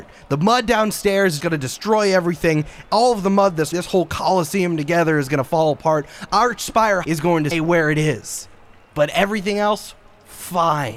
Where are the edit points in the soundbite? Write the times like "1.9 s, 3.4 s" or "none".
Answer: 1.4 s, 3.7 s, 7.0 s, 7.5 s